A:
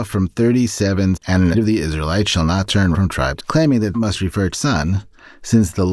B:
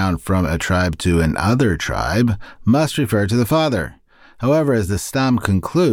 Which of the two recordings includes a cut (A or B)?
A